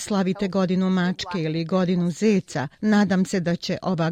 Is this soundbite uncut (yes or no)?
no